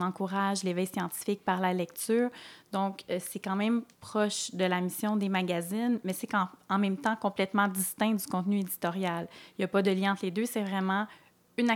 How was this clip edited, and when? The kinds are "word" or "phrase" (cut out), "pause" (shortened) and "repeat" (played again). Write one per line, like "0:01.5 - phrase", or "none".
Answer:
0:03.9 - pause